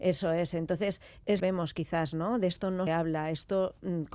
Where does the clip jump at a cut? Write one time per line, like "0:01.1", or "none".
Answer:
0:01.4
0:02.9